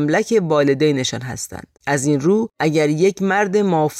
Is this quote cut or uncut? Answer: cut